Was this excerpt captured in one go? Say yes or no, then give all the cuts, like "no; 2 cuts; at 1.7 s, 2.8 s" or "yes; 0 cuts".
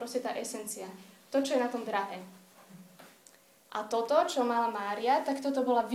yes; 0 cuts